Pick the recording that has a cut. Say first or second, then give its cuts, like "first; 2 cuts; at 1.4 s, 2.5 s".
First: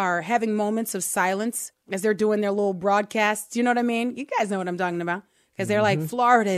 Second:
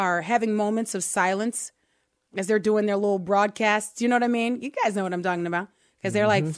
first; 1 cut; at 1.7 s